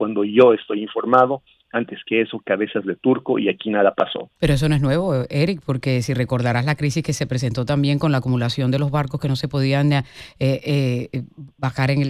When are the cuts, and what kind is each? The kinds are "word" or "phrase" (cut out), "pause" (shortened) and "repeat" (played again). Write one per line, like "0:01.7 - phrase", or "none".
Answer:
0:04.4 - pause